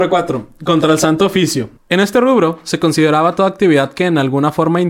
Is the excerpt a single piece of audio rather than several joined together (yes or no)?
no